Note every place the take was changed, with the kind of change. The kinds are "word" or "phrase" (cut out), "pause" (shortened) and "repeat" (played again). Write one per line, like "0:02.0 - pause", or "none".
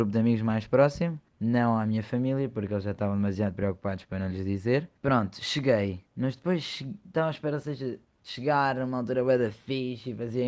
0:01.3 - pause
0:05.0 - pause
0:06.1 - pause